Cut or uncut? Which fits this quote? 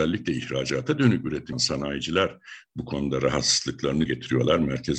cut